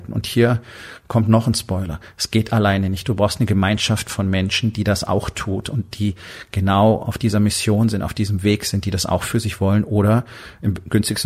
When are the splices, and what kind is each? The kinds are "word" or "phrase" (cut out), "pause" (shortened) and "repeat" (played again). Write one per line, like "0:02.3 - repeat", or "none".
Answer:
none